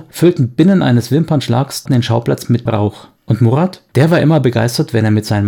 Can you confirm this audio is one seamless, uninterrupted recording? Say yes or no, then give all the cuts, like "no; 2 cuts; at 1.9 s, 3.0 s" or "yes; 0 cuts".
no; 4 cuts; at 1.9 s, 2.7 s, 3.2 s, 3.9 s